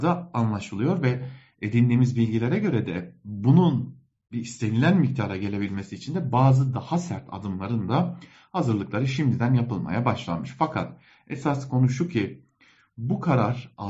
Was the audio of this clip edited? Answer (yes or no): no